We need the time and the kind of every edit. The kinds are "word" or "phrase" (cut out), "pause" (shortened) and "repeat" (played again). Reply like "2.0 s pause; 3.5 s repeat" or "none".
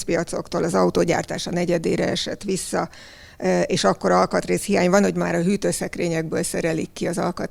none